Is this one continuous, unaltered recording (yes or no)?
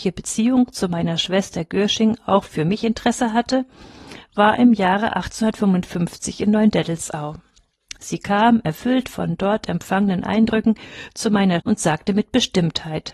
no